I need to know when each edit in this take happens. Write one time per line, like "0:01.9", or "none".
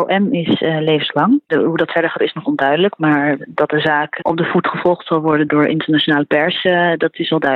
0:02.2
0:05.5